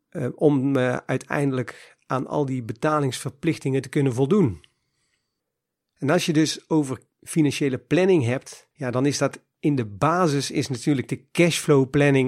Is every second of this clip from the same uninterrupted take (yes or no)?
no